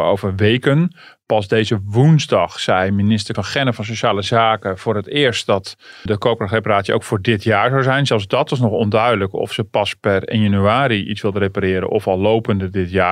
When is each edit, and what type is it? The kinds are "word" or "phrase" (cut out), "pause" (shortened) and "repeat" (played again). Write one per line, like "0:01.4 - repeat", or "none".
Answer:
0:03.3 - word
0:06.1 - word